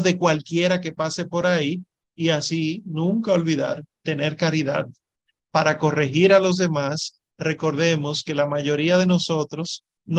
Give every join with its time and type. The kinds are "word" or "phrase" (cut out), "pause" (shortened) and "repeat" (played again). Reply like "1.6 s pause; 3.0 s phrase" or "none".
none